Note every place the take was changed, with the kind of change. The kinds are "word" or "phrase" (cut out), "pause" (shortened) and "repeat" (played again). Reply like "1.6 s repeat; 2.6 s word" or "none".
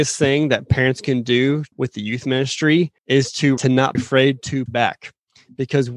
1.7 s phrase; 3.0 s pause; 3.6 s phrase; 3.9 s word; 4.7 s word